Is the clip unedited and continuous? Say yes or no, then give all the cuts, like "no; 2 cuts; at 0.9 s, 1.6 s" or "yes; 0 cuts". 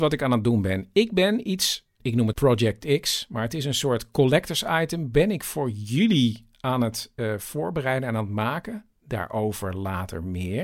no; 2 cuts; at 2.0 s, 2.3 s